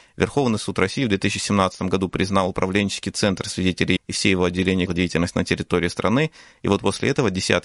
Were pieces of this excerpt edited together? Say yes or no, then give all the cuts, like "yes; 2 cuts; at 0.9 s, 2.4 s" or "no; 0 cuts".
yes; 2 cuts; at 4.0 s, 4.9 s